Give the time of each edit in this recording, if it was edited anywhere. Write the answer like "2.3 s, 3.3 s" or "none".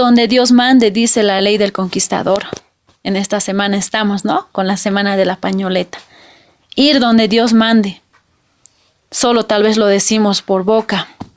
none